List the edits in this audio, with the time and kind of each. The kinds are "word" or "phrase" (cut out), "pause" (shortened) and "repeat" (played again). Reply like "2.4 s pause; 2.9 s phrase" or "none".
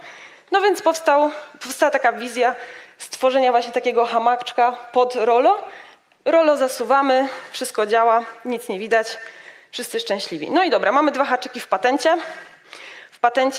none